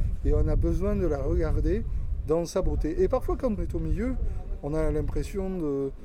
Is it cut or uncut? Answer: cut